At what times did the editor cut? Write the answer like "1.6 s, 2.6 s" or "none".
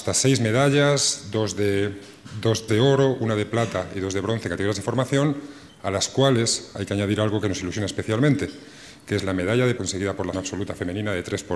2.7 s, 9.8 s, 10.3 s